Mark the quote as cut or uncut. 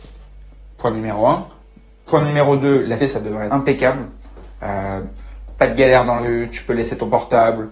cut